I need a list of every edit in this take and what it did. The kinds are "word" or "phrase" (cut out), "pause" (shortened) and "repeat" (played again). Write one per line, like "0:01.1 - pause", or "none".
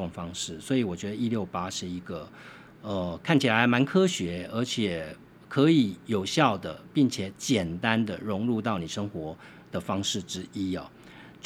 none